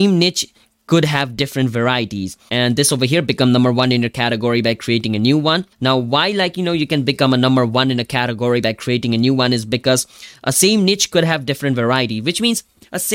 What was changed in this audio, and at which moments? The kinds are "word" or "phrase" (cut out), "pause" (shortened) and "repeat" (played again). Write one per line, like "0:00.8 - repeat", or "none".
0:05.7 - pause